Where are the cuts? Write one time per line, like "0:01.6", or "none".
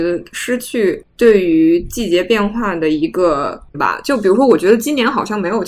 0:03.7